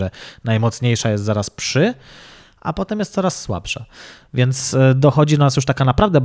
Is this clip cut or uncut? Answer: uncut